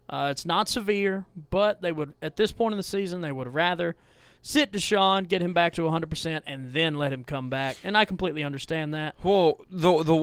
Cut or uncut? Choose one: uncut